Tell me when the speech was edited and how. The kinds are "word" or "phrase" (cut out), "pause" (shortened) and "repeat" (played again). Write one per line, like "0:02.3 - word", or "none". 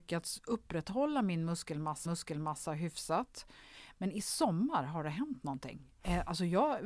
0:02.1 - repeat